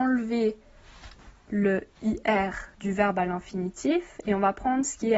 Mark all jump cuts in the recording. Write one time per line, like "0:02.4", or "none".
0:02.7